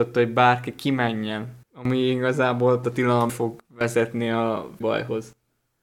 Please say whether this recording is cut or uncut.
cut